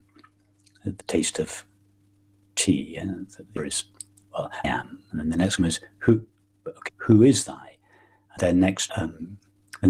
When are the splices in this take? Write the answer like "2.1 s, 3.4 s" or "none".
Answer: 1.0 s, 3.6 s, 4.6 s, 5.6 s, 6.9 s, 7.5 s, 8.4 s, 8.9 s